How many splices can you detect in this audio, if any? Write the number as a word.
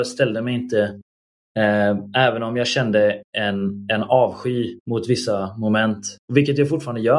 zero